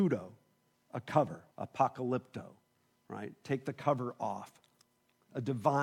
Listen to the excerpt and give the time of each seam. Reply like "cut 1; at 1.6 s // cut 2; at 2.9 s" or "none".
cut 1; at 1.5 s